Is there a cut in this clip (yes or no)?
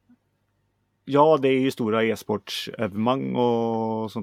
no